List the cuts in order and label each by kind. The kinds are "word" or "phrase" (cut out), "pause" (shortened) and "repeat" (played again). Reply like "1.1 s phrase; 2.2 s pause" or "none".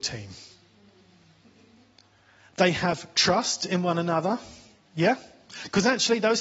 none